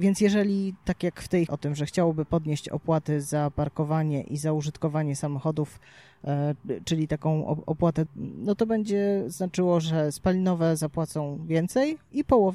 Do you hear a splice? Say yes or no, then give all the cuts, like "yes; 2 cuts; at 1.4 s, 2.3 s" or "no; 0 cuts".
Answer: yes; 2 cuts; at 1.5 s, 8.1 s